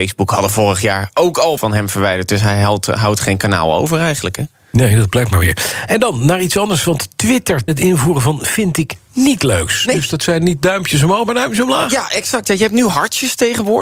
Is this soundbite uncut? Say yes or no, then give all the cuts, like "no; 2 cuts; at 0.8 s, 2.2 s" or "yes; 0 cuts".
no; 2 cuts; at 1.6 s, 7.7 s